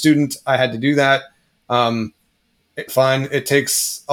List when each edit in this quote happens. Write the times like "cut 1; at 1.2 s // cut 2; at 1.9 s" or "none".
cut 1; at 2.9 s